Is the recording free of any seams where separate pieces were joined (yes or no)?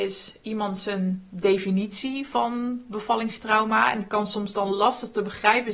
yes